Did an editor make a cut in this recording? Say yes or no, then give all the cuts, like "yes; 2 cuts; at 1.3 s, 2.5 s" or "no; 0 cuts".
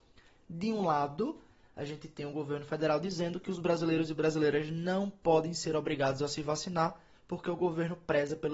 no; 0 cuts